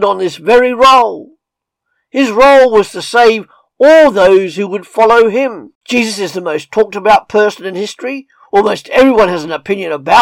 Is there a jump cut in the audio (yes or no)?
yes